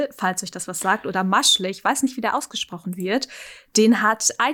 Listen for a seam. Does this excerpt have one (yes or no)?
no